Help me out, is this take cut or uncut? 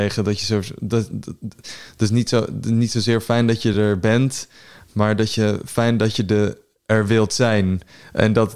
uncut